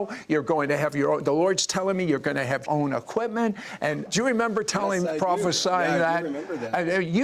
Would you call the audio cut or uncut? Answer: cut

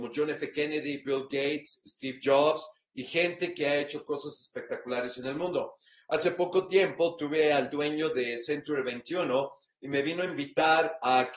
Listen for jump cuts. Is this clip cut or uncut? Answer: uncut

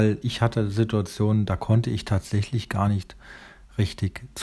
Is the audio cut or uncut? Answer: uncut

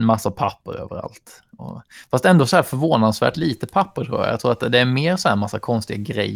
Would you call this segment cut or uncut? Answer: uncut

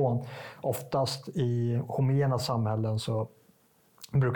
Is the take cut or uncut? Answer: uncut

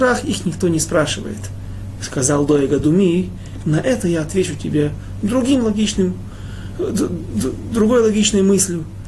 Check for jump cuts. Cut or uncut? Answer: uncut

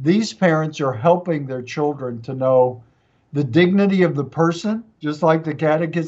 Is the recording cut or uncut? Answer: uncut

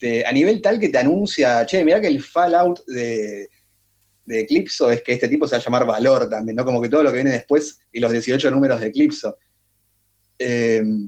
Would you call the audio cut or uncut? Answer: uncut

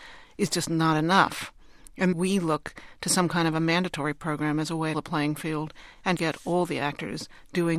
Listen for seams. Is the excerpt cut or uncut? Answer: cut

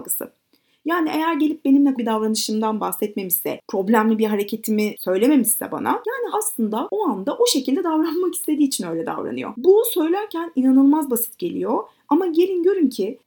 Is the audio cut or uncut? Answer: cut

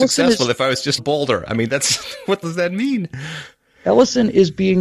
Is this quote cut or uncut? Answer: cut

